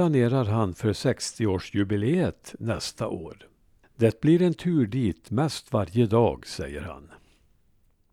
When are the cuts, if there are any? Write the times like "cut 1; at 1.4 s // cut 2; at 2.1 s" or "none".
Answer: none